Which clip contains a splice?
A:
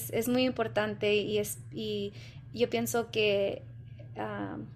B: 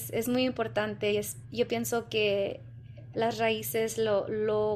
B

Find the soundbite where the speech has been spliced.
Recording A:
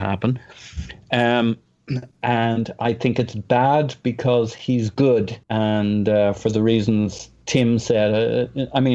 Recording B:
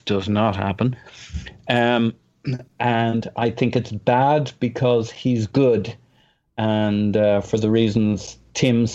A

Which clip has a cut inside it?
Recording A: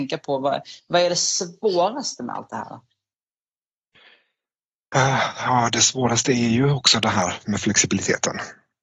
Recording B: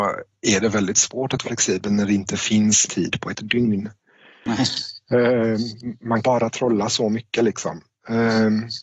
B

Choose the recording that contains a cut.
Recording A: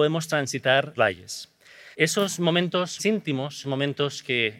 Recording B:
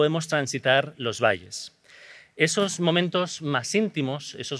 A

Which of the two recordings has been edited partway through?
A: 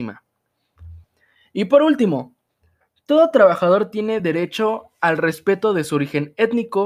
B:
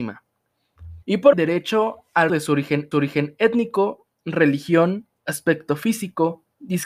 B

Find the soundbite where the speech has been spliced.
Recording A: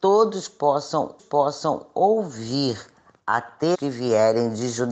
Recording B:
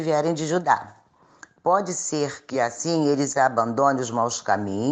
A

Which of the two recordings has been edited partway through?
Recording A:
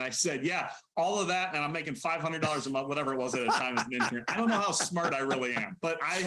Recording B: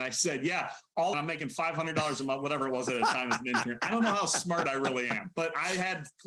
B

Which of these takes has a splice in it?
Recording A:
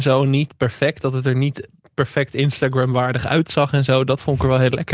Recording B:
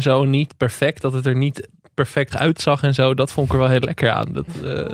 B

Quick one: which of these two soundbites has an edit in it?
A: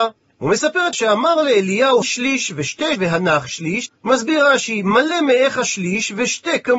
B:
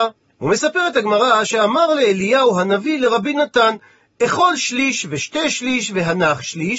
A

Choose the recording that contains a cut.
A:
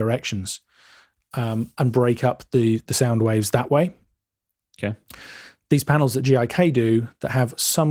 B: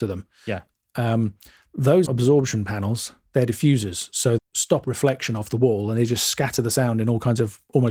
B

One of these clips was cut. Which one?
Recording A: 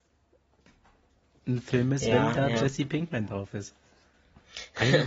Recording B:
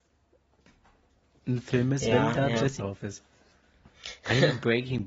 B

